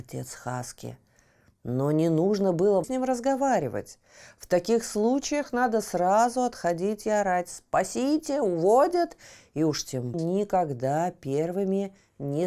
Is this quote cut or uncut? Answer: cut